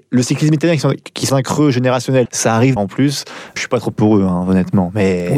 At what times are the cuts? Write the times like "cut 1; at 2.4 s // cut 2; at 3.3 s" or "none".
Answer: cut 1; at 1.3 s // cut 2; at 2.3 s // cut 3; at 2.8 s // cut 4; at 3.6 s // cut 5; at 3.9 s